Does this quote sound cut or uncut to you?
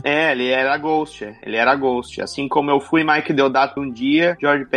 cut